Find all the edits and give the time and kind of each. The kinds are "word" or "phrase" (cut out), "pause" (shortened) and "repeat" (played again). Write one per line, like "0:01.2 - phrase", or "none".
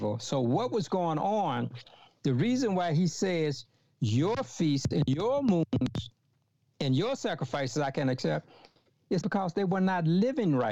0:09.2 - word